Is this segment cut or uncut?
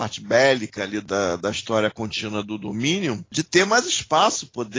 uncut